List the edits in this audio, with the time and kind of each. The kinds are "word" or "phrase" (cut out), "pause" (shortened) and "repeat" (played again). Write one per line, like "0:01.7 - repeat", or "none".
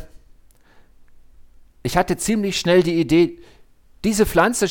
none